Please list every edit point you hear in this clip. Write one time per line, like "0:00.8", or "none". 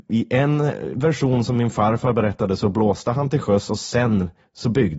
none